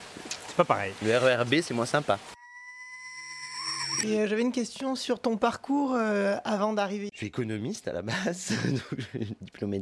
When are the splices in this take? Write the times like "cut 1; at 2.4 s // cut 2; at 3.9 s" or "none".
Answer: cut 1; at 7.1 s